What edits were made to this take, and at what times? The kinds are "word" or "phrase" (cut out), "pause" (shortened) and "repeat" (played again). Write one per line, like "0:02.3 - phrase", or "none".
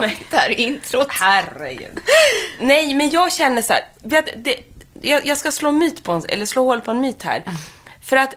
none